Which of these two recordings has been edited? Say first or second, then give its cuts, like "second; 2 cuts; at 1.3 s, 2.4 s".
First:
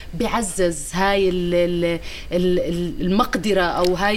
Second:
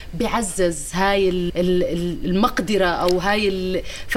second; 1 cut; at 1.5 s